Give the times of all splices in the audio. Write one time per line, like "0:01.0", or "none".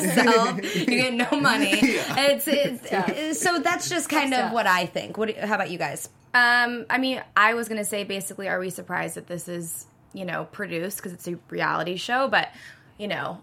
none